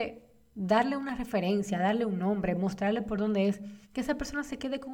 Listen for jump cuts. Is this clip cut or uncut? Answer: cut